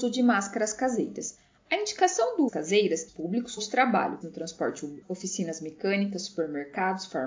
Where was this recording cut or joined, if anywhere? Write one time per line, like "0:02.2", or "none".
0:02.5
0:03.1
0:03.6
0:04.2
0:05.0

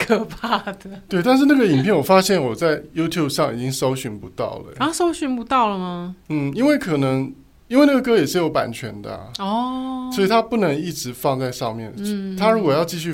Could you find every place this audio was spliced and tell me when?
none

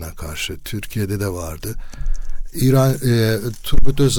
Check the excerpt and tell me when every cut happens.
none

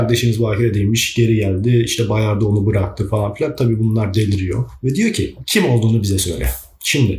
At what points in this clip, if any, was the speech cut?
none

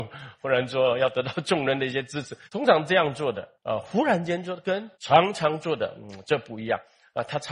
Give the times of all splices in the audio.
0:02.5
0:03.6
0:04.9

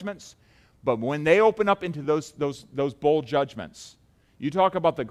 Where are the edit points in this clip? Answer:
none

